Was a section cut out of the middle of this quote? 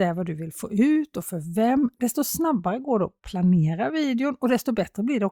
no; 0 cuts

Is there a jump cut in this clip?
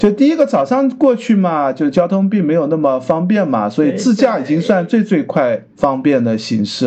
yes; 1 cut; at 5.7 s

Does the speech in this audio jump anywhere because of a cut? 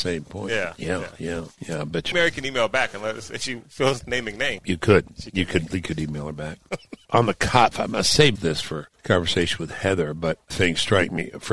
yes; 6 cuts; at 2.1 s, 4.0 s, 7.1 s, 7.7 s, 8.4 s, 10.5 s

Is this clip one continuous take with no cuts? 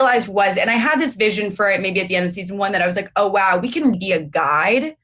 no; 1 cut; at 3.9 s

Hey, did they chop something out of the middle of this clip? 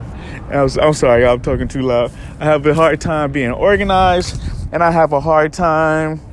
no; 0 cuts

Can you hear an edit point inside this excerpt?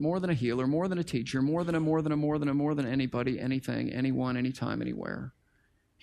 no; 0 cuts

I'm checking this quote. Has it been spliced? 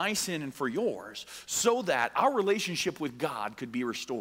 no; 0 cuts

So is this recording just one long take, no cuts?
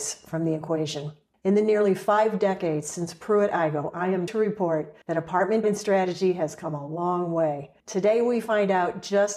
no; 5 cuts; at 1.3 s, 4.3 s, 5.0 s, 5.6 s, 7.8 s

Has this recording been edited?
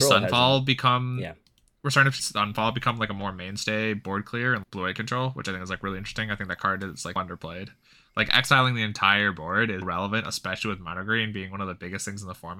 yes; 4 cuts; at 2.2 s, 4.6 s, 7.2 s, 9.8 s

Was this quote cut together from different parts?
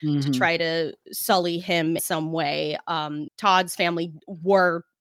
yes; 2 cuts; at 2.0 s, 3.3 s

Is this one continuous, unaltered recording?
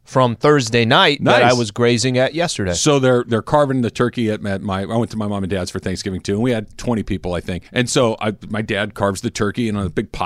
no; 1 cut; at 7.7 s

